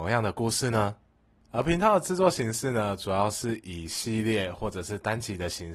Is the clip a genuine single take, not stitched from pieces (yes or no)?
yes